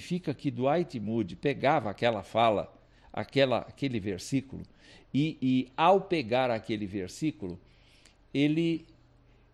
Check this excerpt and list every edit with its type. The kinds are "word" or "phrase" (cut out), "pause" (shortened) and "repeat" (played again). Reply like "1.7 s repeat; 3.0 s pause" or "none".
none